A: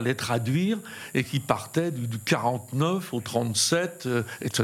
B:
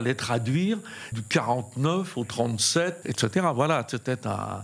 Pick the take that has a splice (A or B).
B